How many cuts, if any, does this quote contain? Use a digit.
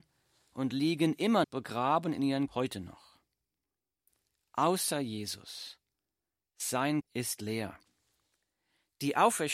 3